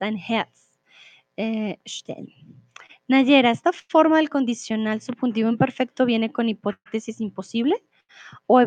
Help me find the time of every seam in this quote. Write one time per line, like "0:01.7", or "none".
none